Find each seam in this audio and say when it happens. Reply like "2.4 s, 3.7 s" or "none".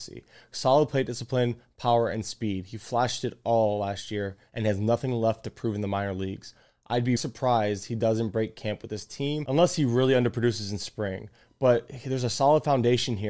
7.2 s